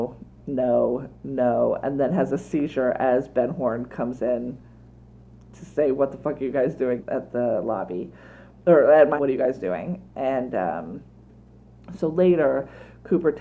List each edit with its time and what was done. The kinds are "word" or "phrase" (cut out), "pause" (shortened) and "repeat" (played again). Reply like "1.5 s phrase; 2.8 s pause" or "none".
7.0 s word; 9.2 s word